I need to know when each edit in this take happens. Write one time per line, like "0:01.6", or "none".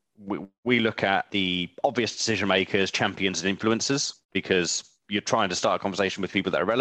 0:04.2